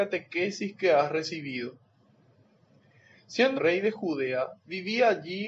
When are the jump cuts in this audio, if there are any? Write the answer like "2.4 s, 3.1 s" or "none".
3.6 s